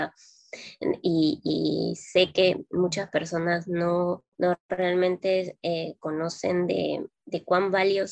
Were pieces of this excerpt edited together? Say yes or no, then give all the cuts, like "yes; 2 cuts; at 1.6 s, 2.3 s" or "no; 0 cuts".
yes; 1 cut; at 4.3 s